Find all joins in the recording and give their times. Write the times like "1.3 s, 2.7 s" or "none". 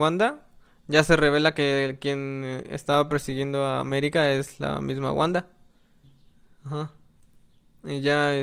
6.0 s